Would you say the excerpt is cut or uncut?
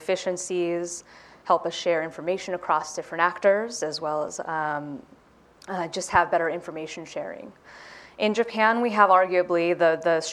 uncut